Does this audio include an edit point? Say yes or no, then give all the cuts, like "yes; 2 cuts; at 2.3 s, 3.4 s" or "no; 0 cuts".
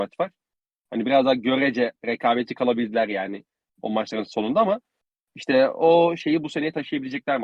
no; 0 cuts